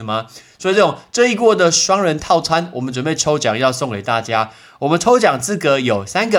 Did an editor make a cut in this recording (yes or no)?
no